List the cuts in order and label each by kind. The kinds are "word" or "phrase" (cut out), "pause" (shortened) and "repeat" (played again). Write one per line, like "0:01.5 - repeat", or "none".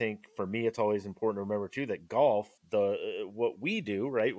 0:02.6 - pause